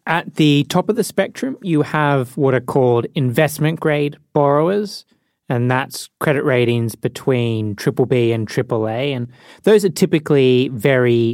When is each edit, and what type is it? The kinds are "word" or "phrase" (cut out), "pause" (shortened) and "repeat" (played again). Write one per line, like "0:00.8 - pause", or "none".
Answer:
none